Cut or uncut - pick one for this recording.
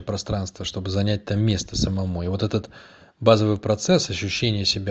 uncut